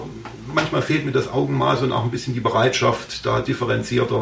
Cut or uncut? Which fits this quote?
uncut